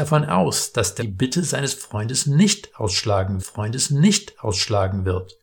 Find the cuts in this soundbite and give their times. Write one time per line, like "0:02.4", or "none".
0:01.0
0:03.4

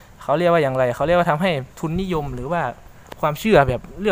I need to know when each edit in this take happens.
0:01.7

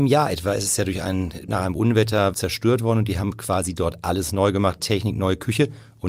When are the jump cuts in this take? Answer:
0:01.5
0:02.3
0:04.8

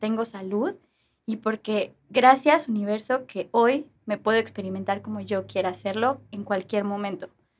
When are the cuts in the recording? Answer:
0:02.0
0:04.0

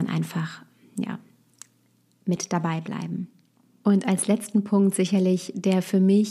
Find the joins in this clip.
none

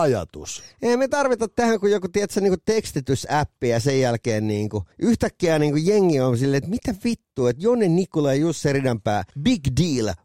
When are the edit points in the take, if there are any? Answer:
0:04.9
0:09.3

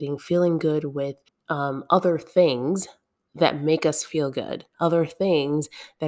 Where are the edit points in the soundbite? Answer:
0:01.3
0:03.2

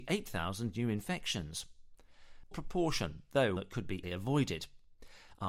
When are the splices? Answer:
0:02.5
0:03.6
0:04.0

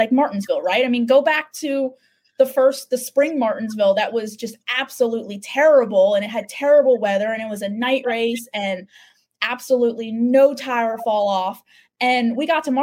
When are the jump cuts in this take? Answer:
none

